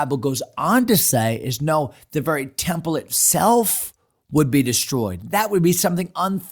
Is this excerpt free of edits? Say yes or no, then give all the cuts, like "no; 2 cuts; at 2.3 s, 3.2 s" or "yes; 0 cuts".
yes; 0 cuts